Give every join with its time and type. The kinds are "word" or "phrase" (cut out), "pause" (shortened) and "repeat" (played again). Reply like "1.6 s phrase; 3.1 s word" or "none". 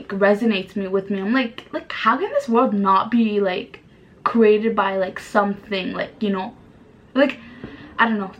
none